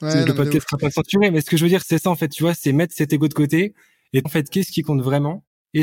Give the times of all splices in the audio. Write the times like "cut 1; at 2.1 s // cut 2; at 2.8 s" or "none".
cut 1; at 4.2 s